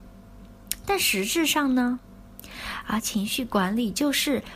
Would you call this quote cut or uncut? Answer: cut